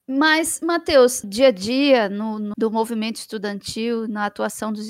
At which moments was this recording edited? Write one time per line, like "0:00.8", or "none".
0:01.2
0:02.5